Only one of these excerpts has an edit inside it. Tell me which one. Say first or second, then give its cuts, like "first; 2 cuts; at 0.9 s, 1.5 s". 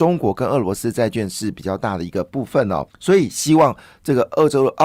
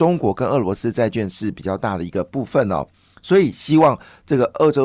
first; 1 cut; at 2.9 s